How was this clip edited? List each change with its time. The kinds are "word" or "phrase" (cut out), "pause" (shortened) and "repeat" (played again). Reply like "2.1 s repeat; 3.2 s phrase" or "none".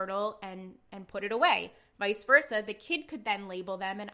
none